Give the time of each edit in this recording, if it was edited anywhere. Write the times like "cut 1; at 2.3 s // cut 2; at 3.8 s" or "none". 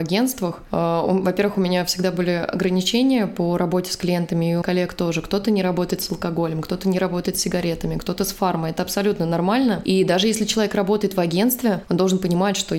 cut 1; at 4.6 s